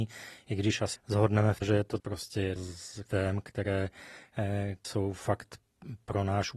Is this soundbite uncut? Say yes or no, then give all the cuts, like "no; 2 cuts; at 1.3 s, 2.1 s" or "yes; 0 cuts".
no; 6 cuts; at 0.9 s, 1.6 s, 2.0 s, 2.6 s, 3.1 s, 4.8 s